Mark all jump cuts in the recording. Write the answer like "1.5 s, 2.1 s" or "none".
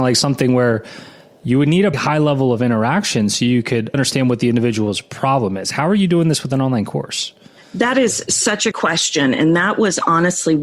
1.9 s, 3.9 s, 8.7 s

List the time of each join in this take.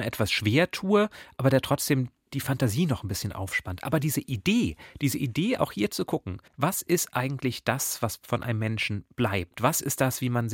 6.5 s

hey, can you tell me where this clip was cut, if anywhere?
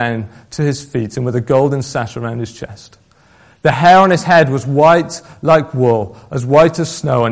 none

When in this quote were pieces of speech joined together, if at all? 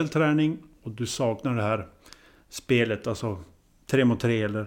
none

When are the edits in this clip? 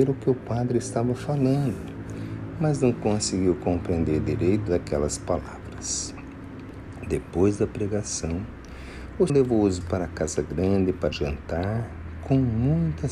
4.7 s, 9.3 s, 9.8 s, 11.1 s

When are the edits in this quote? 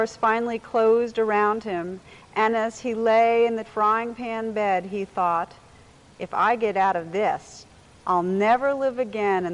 3.6 s

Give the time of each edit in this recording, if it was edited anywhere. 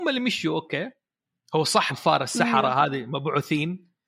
1.3 s, 1.9 s

